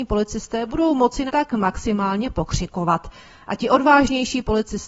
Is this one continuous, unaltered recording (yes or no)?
no